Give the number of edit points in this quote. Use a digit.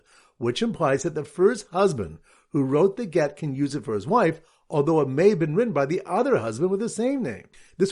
0